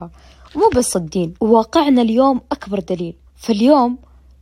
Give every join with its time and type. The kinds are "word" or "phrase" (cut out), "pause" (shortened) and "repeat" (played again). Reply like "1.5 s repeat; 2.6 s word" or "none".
0.9 s word; 1.4 s pause; 3.3 s pause